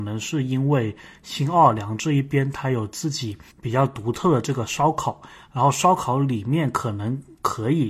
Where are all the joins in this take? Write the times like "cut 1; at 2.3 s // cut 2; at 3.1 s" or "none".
cut 1; at 3.5 s